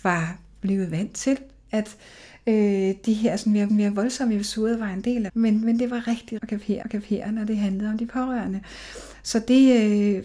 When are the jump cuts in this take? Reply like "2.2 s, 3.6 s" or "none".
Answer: 3.7 s, 5.3 s, 6.4 s, 6.8 s